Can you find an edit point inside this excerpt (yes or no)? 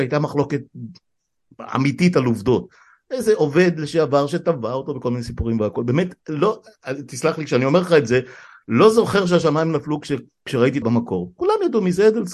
yes